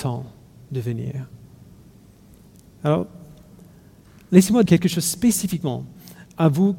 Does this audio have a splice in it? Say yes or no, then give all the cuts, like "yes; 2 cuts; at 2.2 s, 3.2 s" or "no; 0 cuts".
yes; 1 cut; at 4.7 s